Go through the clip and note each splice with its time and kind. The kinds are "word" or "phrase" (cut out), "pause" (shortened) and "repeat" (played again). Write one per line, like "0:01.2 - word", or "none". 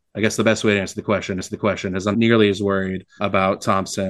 0:01.4 - repeat
0:02.1 - word
0:03.2 - word